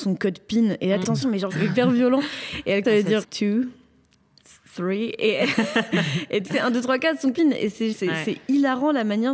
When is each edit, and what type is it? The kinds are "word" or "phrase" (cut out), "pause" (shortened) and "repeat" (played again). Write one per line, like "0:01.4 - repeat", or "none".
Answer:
0:01.0 - word
0:01.5 - word
0:02.8 - word
0:03.2 - word
0:06.5 - word
0:07.3 - word
0:07.9 - word